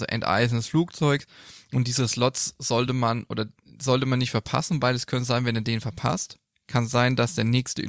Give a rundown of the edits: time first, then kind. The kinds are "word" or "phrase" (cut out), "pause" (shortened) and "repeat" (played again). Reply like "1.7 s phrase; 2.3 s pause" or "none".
none